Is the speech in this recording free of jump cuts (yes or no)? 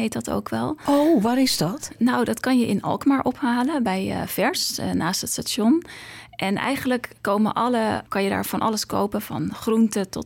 no